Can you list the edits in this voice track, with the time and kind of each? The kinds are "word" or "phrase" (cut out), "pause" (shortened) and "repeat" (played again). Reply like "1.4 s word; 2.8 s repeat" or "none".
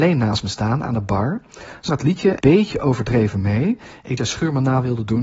1.9 s word; 2.4 s word; 4.2 s phrase